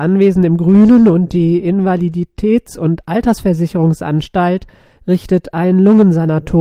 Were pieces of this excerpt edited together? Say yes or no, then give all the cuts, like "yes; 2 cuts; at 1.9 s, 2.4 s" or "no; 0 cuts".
no; 0 cuts